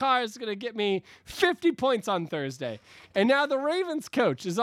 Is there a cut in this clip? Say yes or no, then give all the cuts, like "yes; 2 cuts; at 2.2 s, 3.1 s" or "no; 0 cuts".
no; 0 cuts